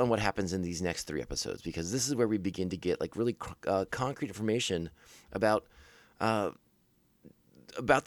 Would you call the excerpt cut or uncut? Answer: uncut